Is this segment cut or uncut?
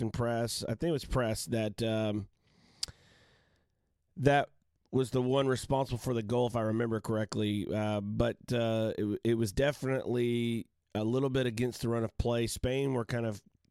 uncut